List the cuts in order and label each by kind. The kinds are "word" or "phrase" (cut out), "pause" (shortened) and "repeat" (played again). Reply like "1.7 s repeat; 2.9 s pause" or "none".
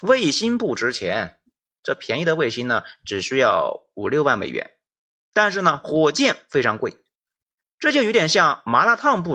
none